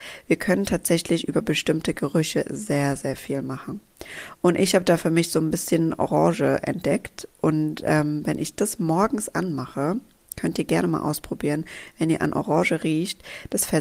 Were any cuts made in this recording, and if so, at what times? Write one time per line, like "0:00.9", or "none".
none